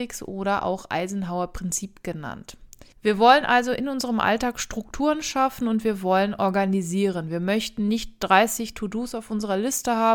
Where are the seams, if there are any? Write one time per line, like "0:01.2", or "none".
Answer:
none